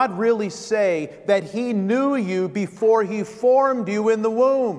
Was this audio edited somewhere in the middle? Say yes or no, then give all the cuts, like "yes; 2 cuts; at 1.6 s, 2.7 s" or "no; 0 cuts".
no; 0 cuts